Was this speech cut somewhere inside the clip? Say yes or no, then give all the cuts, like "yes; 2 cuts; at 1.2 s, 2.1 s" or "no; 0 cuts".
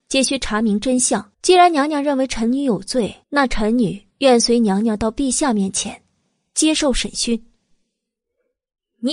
yes; 3 cuts; at 1.3 s, 3.2 s, 4.1 s